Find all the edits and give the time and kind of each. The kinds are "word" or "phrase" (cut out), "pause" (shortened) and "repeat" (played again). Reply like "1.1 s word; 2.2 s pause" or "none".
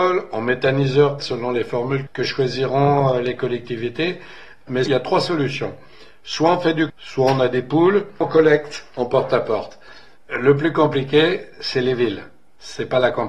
1.2 s word; 2.1 s word; 4.9 s word; 6.9 s word; 8.2 s word